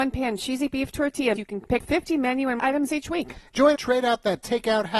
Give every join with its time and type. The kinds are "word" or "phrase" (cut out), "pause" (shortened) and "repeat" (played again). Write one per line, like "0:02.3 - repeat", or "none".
0:01.4 - word
0:01.8 - word
0:02.6 - word
0:03.7 - word